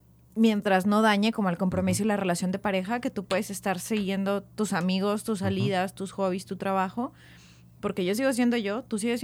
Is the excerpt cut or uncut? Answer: uncut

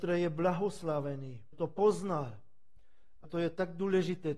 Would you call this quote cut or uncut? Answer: cut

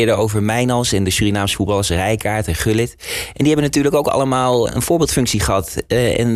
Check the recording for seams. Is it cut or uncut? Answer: cut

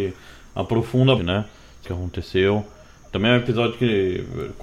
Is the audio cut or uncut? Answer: cut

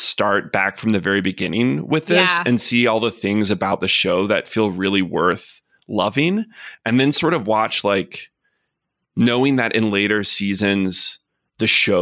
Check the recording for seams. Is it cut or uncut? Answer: uncut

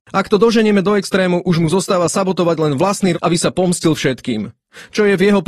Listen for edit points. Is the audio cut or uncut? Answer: cut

